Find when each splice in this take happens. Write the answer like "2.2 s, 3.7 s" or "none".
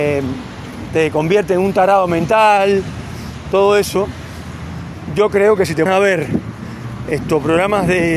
5.9 s